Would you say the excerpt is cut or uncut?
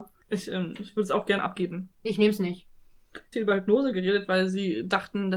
cut